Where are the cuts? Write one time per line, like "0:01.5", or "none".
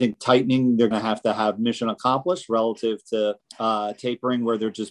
0:00.9
0:03.4